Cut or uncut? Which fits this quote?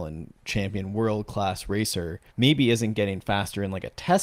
cut